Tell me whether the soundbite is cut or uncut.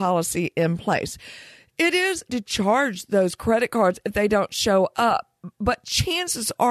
cut